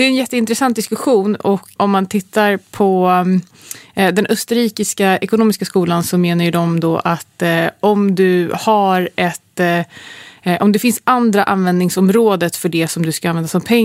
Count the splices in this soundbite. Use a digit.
1